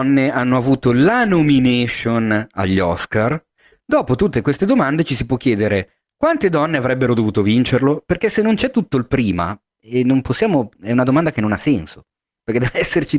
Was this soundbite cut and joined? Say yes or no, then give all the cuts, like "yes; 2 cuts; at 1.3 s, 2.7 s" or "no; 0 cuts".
no; 0 cuts